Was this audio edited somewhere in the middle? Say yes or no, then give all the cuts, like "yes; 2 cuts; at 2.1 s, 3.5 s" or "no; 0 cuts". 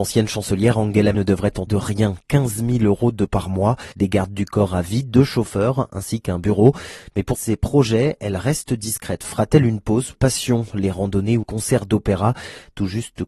yes; 7 cuts; at 1.1 s, 1.7 s, 3.3 s, 3.9 s, 7.3 s, 10.1 s, 11.4 s